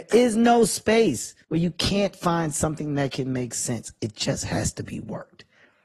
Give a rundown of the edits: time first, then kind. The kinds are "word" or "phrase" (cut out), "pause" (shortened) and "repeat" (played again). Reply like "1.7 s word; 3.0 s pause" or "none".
1.4 s pause